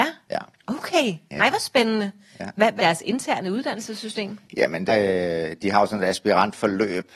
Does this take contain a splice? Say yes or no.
yes